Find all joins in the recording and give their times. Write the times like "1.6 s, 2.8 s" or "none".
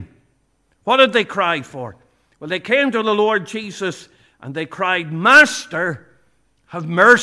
none